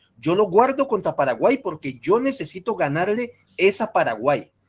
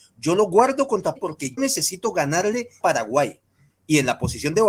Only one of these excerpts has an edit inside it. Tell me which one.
second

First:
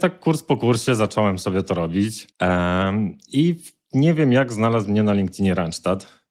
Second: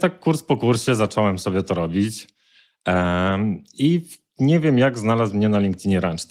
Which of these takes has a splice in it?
first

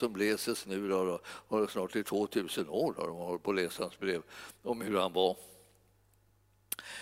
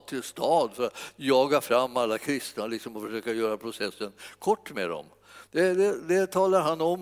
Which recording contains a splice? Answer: second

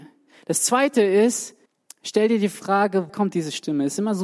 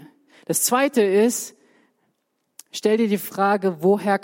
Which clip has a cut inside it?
first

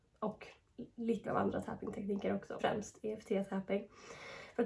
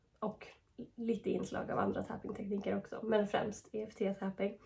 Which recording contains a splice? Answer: first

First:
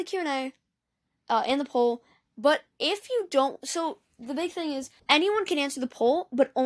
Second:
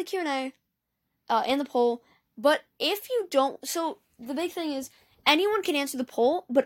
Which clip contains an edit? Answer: first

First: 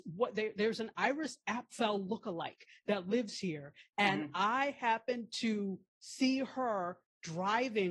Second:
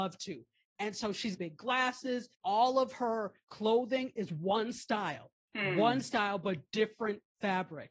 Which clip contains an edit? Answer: second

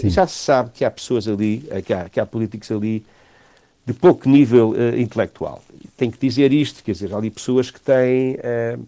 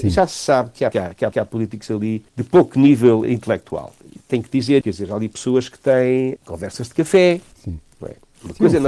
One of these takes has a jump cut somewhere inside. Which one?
second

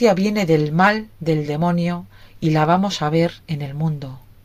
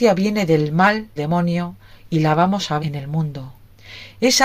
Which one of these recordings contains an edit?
second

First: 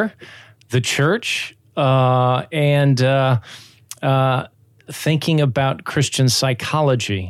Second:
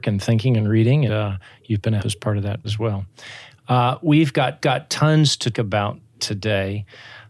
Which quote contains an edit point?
second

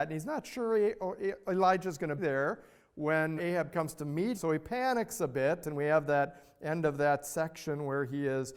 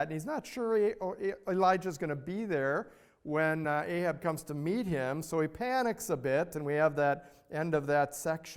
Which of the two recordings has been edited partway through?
first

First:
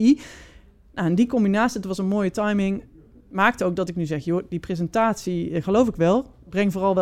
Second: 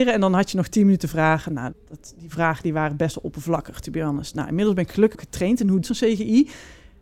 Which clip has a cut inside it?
second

